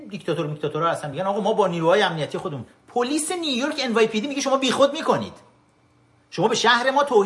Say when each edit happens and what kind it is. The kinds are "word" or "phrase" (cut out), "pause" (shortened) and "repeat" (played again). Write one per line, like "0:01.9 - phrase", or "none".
none